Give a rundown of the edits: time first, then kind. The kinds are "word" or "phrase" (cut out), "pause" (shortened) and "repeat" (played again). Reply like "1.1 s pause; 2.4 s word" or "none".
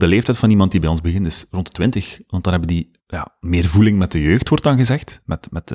3.0 s pause